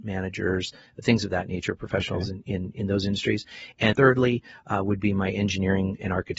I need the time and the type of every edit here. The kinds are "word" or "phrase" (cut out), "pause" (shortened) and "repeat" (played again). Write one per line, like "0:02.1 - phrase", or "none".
0:03.9 - word